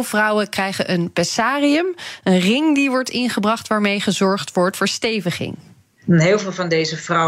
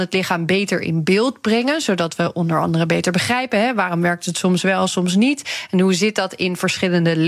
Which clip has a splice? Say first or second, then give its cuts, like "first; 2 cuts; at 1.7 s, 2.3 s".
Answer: first; 1 cut; at 4.7 s